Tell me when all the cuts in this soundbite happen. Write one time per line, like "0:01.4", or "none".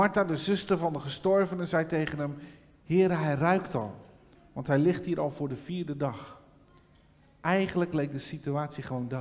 none